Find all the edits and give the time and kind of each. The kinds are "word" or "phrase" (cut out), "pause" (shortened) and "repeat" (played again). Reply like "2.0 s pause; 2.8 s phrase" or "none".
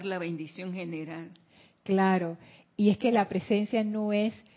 none